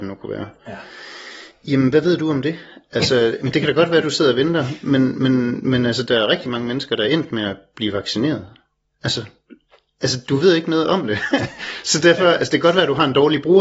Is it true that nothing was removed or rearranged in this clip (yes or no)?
yes